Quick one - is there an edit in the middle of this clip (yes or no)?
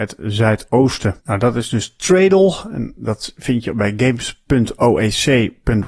yes